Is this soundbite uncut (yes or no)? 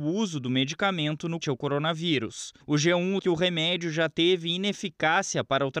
no